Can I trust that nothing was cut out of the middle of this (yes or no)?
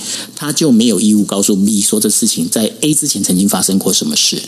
yes